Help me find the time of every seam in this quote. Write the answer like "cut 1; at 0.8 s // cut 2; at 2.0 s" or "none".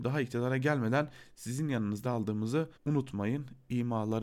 cut 1; at 2.0 s // cut 2; at 2.8 s